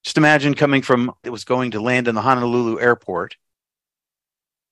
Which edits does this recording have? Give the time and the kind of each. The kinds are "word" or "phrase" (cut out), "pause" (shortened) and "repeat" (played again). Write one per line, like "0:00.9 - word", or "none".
0:01.2 - phrase